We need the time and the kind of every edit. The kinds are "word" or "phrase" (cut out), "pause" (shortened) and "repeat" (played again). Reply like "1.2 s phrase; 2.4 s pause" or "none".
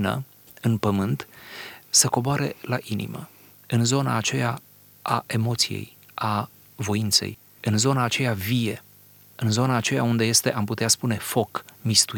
none